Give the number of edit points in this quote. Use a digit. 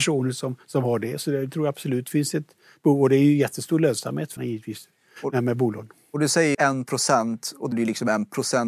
3